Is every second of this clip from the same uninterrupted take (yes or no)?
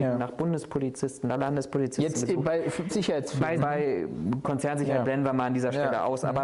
no